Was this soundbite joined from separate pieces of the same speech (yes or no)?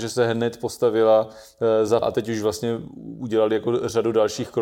yes